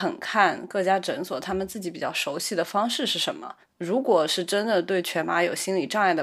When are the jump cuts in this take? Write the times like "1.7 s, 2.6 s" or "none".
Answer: 3.6 s